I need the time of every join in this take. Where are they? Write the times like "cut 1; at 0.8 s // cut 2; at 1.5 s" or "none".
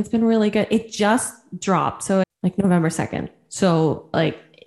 cut 1; at 2.2 s